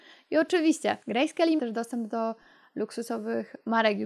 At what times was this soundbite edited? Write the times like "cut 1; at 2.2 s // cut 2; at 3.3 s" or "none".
cut 1; at 1.0 s // cut 2; at 1.6 s